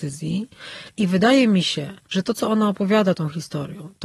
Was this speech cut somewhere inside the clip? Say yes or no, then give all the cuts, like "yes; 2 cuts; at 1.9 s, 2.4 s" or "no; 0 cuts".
yes; 1 cut; at 2.0 s